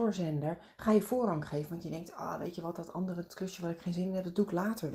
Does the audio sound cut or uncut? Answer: uncut